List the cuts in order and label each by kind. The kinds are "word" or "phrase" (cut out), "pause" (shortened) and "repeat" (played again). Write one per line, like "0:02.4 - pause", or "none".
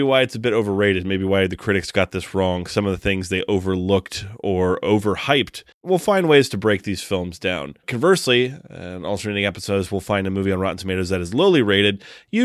0:07.8 - pause

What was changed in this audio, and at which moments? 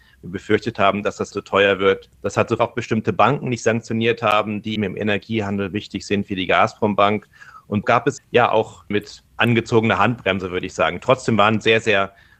0:01.3 - word
0:02.1 - pause
0:02.6 - phrase
0:04.8 - word
0:07.8 - word
0:08.2 - word
0:08.9 - phrase
0:09.3 - pause

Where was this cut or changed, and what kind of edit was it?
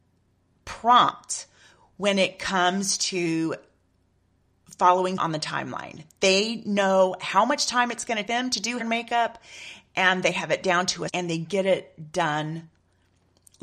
0:05.2 - word
0:08.3 - word
0:08.8 - word
0:11.1 - word

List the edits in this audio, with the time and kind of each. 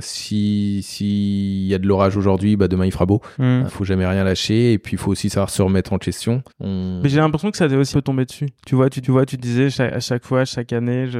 0:03.3 - pause
0:03.7 - word
0:06.5 - pause
0:07.9 - word
0:08.6 - pause
0:09.0 - repeat

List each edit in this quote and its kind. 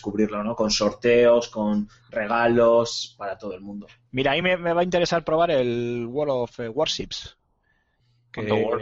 none

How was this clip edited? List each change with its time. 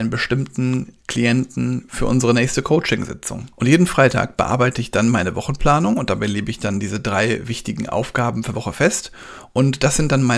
0:03.5 - pause
0:08.5 - word

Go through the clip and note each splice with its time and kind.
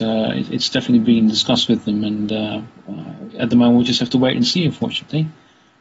none

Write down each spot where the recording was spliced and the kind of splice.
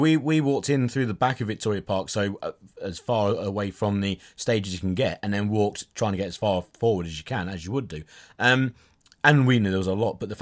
none

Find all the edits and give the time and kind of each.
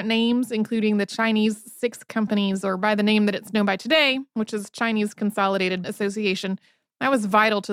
0:05.8 - word

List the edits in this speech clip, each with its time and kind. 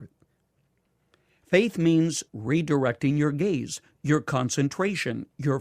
0:02.3 - pause

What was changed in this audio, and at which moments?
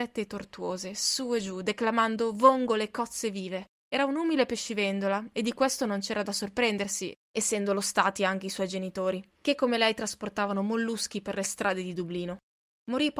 0:03.7 - pause

